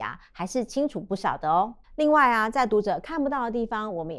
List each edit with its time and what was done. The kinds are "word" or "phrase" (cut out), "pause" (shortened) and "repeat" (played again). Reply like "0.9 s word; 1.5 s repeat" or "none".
1.8 s pause